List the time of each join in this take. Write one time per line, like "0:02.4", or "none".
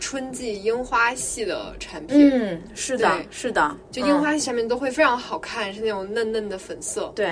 none

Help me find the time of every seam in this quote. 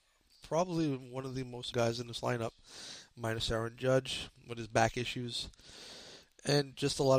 0:01.7

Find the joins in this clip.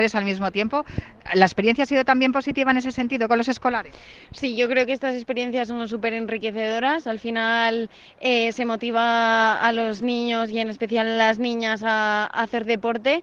none

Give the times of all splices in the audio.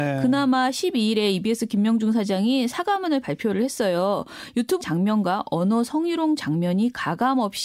0:04.8

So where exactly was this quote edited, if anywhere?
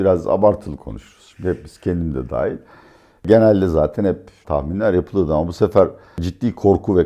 0:04.4

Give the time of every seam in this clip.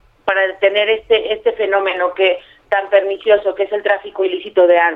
none

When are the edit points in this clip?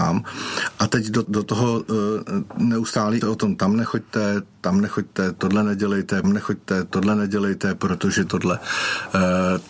0:01.2
0:03.2
0:06.2

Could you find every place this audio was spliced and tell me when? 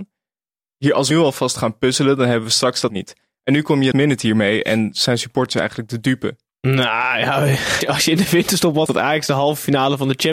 0:01.1
0:02.9
0:03.9
0:06.5
0:07.8
0:08.9

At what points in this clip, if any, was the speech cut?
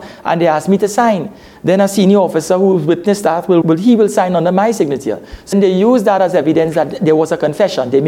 0:03.6
0:05.5

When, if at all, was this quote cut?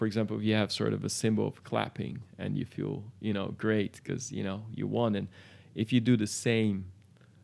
none

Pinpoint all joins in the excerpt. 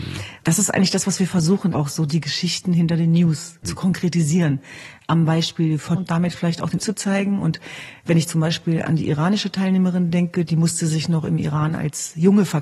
0:01.7
0:06.0
0:06.8

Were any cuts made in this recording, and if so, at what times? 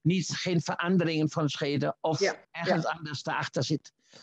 0:02.4

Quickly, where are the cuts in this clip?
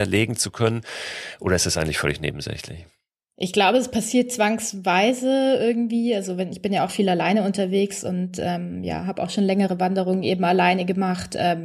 none

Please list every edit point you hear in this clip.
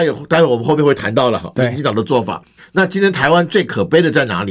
0:02.6

